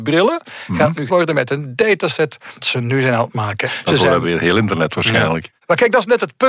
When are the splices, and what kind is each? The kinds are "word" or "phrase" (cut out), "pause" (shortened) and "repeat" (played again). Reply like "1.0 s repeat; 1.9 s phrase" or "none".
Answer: 1.1 s word; 2.6 s word; 4.2 s word; 4.9 s word